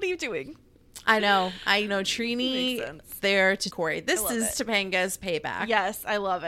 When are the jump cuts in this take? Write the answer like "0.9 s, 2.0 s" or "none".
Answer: 1.2 s, 1.9 s, 3.2 s, 3.7 s